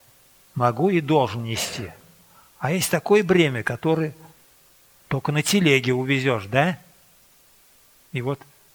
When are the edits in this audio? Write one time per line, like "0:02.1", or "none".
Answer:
none